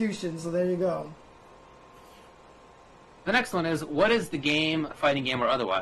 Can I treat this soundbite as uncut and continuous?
yes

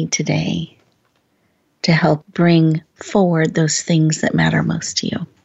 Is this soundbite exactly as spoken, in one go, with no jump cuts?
no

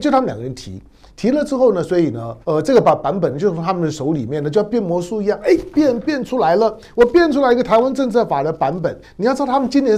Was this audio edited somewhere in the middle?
yes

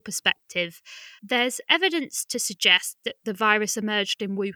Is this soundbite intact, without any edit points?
yes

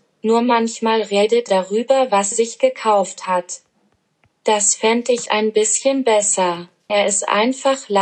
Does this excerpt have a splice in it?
yes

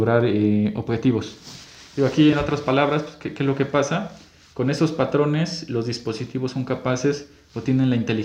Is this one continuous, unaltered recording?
yes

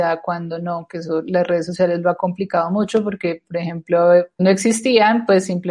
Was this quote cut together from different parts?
yes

